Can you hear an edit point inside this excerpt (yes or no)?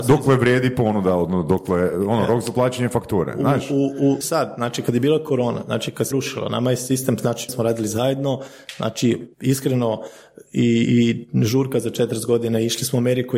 yes